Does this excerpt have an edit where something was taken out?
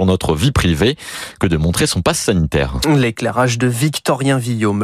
no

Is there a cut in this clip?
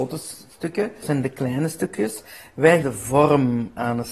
yes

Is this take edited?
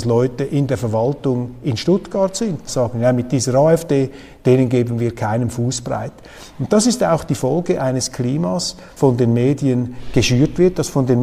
yes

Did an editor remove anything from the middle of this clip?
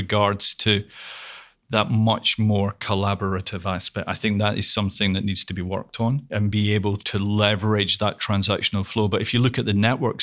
no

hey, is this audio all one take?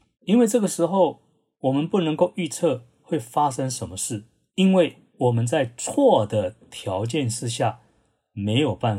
yes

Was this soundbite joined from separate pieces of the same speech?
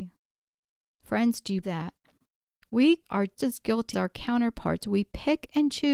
yes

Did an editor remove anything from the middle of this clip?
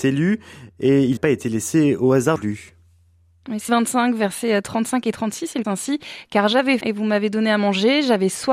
yes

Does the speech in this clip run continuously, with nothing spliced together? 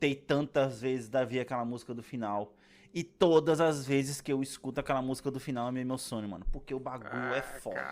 yes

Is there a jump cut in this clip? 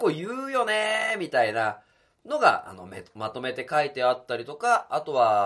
no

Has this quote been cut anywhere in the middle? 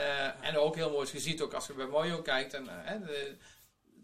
no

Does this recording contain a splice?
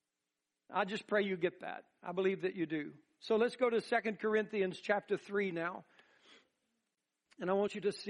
no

